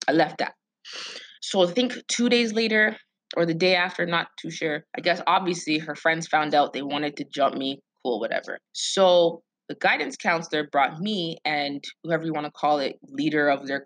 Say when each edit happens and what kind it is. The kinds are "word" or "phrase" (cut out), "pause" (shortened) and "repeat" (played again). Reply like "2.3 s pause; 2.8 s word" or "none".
1.4 s pause; 3.2 s pause; 4.9 s pause; 8.7 s pause